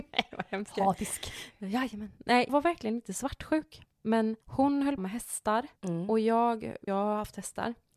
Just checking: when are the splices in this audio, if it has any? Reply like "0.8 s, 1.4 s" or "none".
2.5 s, 4.4 s, 5.0 s, 5.8 s, 6.9 s